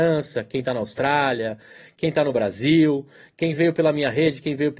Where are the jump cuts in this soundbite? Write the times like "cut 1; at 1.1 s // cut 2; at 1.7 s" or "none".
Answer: none